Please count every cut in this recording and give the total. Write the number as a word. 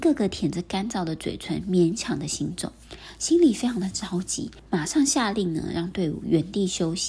one